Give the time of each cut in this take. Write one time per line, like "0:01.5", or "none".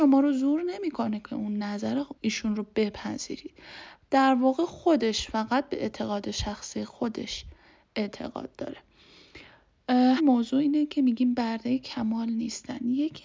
0:02.2
0:10.2